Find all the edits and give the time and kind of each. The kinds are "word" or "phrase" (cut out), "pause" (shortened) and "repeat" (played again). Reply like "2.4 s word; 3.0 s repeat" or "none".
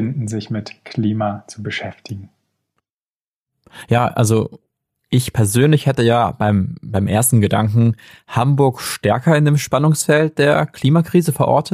none